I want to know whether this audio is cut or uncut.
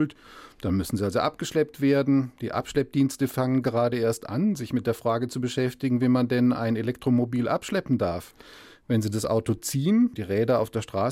cut